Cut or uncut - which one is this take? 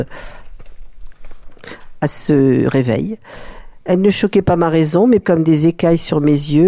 cut